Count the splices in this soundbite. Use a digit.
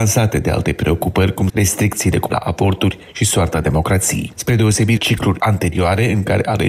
3